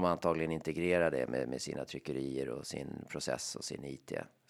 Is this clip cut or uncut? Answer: uncut